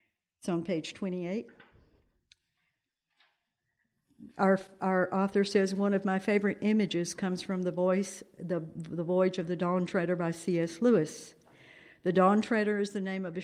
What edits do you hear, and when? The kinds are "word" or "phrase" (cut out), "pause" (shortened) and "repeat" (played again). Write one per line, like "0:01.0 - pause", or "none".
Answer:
none